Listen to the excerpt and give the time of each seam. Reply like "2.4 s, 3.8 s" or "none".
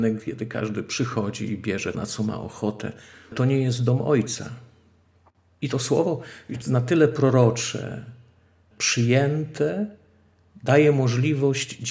1.9 s, 3.3 s, 6.6 s, 8.7 s